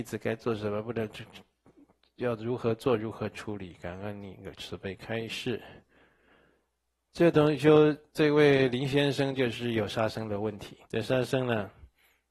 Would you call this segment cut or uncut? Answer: cut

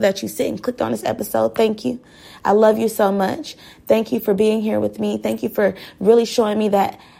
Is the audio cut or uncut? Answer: uncut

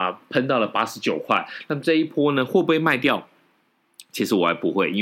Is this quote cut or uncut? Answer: uncut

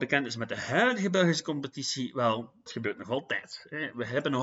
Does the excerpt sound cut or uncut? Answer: cut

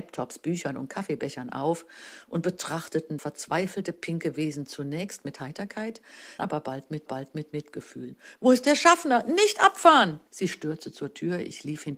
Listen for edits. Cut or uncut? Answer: cut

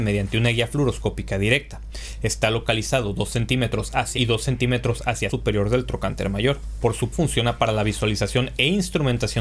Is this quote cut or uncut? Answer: cut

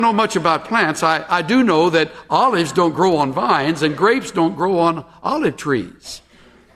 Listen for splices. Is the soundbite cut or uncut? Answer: uncut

